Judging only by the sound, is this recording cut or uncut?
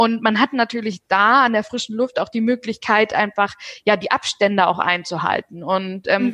uncut